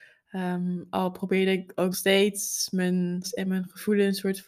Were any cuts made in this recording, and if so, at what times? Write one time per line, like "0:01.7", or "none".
0:01.9
0:03.2